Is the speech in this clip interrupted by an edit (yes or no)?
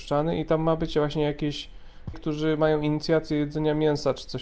yes